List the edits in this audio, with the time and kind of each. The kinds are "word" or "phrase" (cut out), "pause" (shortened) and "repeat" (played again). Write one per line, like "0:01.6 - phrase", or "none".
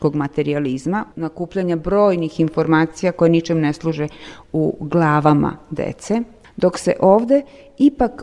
none